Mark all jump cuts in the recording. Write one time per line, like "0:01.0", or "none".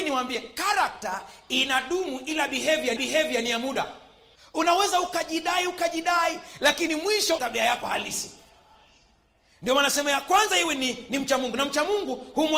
0:03.0
0:04.3
0:07.4